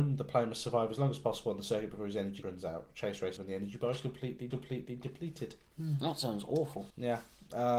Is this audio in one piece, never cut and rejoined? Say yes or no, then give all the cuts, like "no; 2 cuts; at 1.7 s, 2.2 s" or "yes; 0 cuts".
no; 4 cuts; at 2.4 s, 3.4 s, 4.5 s, 6.9 s